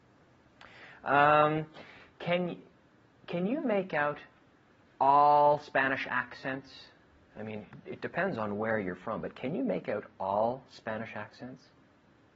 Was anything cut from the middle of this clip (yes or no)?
no